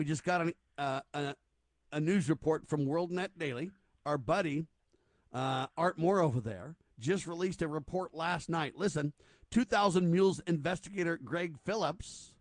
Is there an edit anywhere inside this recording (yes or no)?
no